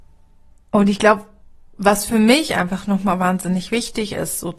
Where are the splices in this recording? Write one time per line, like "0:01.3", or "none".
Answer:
0:01.4